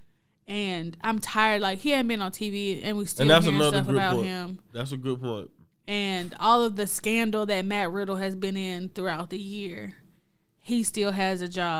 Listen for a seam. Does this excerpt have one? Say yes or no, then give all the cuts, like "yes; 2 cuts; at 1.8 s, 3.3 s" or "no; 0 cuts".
no; 0 cuts